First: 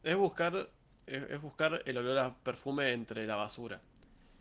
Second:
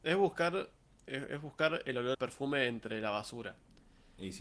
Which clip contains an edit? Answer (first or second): second